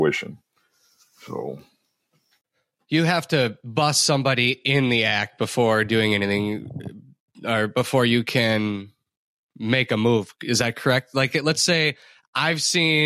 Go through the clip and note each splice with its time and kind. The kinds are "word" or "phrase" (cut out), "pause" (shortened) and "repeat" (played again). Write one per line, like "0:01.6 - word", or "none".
none